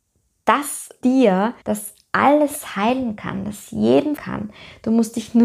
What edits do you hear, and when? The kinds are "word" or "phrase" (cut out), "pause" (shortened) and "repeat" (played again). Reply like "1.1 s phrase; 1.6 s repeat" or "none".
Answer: 1.0 s word; 1.6 s pause; 4.2 s word